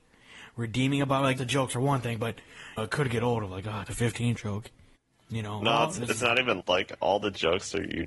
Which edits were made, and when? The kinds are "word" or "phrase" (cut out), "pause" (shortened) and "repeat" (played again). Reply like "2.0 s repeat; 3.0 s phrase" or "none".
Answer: 1.4 s word; 2.8 s phrase; 3.9 s phrase; 4.4 s word; 5.0 s pause; 6.6 s word